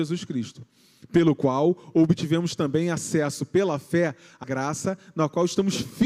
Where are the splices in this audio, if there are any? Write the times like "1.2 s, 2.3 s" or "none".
4.4 s